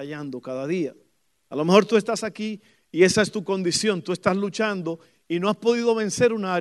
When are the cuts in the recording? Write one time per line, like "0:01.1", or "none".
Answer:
none